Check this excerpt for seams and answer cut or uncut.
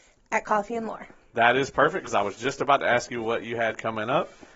uncut